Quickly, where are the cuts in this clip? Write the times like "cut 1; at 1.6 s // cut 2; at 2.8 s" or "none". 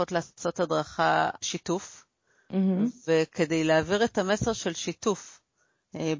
cut 1; at 1.4 s